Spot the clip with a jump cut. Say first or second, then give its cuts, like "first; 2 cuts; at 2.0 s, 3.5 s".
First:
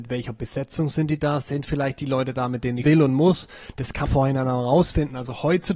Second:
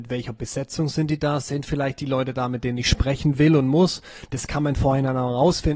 first; 2 cuts; at 2.8 s, 4.1 s